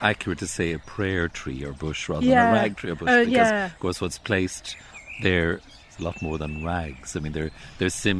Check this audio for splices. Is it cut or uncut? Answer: uncut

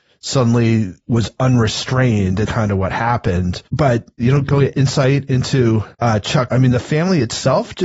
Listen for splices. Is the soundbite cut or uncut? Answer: cut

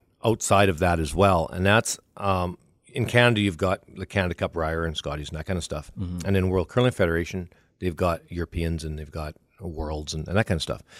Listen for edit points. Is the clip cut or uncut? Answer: uncut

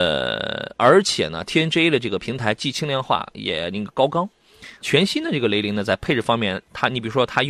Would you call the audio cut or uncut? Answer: cut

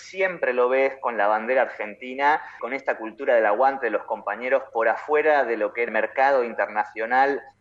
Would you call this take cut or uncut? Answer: cut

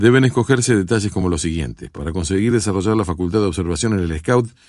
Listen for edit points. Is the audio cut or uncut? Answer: uncut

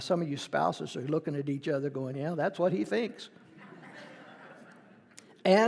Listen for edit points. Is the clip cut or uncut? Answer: uncut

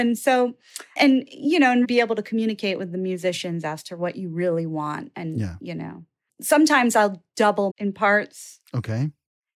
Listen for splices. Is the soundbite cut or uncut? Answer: cut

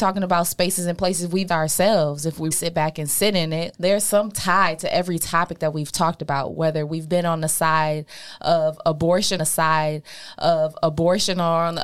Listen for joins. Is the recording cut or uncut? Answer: cut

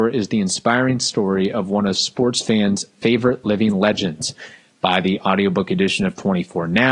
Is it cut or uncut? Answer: uncut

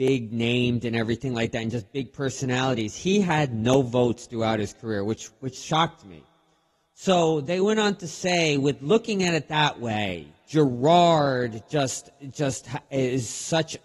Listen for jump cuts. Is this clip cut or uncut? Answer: uncut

